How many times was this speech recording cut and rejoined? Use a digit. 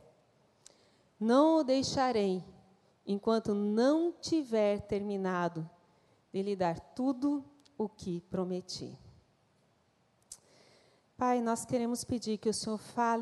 0